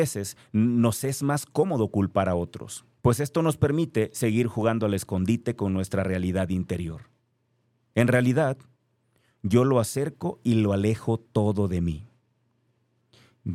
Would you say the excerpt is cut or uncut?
cut